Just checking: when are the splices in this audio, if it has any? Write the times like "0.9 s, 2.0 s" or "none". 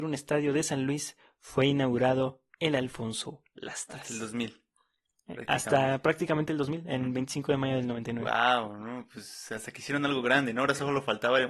none